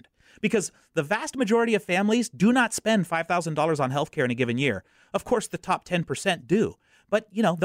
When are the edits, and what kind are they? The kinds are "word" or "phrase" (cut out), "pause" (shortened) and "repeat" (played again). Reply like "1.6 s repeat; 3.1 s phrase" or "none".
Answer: none